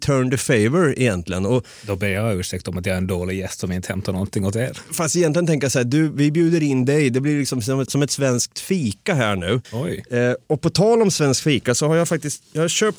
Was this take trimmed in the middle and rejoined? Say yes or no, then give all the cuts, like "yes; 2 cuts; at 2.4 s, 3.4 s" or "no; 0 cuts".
yes; 2 cuts; at 7.9 s, 9.6 s